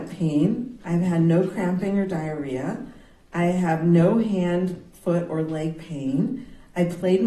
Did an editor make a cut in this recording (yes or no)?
no